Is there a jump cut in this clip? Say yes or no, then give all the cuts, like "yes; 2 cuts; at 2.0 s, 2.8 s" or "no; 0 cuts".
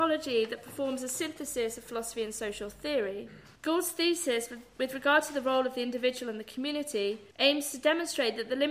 yes; 2 cuts; at 3.6 s, 7.3 s